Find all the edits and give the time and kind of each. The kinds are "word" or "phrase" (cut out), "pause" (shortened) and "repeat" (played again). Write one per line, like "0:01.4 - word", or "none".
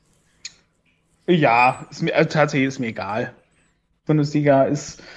none